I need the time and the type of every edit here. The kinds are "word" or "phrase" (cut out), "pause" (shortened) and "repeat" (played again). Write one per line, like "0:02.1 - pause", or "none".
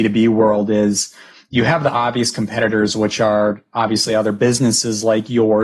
none